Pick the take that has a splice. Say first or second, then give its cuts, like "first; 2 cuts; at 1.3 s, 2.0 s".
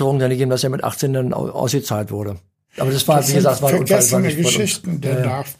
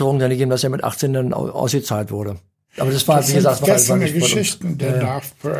second; 1 cut; at 3.6 s